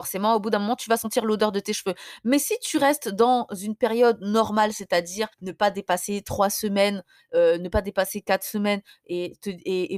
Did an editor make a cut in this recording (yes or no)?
yes